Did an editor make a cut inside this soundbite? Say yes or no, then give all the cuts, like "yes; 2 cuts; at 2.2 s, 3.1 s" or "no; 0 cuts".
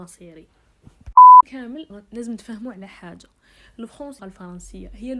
yes; 3 cuts; at 1.4 s, 1.9 s, 4.2 s